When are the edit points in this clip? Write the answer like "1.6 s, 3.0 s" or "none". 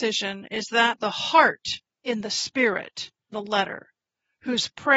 1.0 s, 1.9 s, 3.3 s